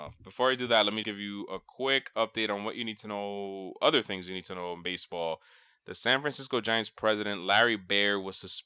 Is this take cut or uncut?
cut